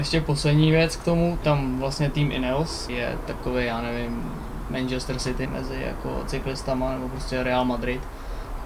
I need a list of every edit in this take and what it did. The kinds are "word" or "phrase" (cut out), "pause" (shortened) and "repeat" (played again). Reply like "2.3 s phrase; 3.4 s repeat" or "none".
1.4 s phrase; 2.9 s word; 5.4 s word